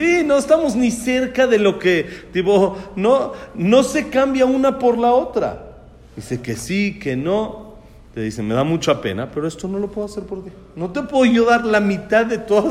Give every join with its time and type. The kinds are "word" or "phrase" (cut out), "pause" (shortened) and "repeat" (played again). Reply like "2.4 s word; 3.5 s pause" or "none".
none